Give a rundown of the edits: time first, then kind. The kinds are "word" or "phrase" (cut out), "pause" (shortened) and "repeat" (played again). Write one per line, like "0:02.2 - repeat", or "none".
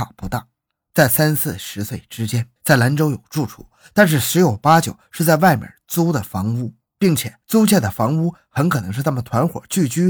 0:02.6 - pause
0:07.4 - pause